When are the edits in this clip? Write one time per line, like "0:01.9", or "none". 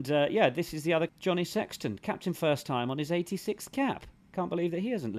0:01.1
0:02.3